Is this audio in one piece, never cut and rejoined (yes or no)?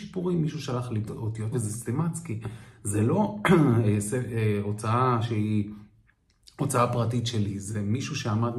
no